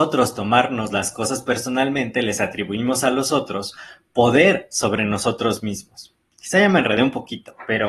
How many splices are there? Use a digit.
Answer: 0